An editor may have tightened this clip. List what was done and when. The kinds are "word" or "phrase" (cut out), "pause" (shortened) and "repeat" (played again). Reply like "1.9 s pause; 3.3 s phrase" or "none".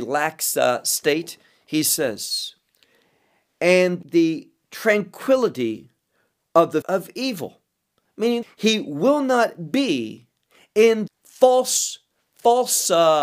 4.0 s word; 6.8 s word; 8.4 s word; 11.1 s word